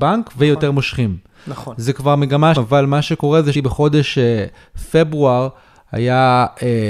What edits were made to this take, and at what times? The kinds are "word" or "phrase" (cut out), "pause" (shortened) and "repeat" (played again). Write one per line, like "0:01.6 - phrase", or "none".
0:02.6 - phrase
0:03.5 - word